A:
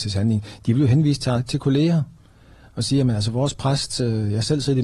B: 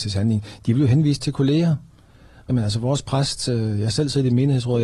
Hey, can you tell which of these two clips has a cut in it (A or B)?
B